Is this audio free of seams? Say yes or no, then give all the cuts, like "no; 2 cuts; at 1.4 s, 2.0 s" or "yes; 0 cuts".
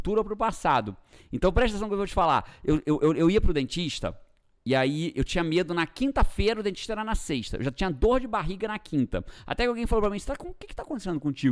yes; 0 cuts